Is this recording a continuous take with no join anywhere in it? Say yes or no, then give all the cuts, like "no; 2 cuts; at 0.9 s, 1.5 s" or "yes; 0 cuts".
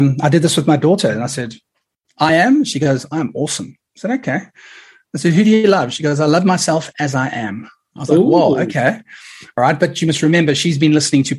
yes; 0 cuts